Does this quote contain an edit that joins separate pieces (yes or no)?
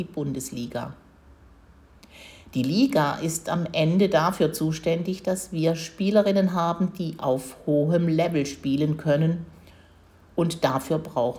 no